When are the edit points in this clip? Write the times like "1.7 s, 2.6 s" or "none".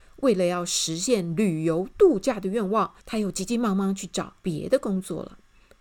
3.0 s, 4.4 s